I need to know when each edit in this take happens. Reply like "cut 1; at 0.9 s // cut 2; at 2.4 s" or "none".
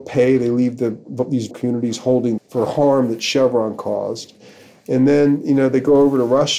cut 1; at 1.5 s // cut 2; at 2.4 s